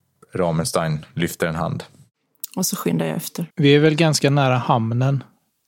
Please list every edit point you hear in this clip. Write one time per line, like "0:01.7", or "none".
0:03.5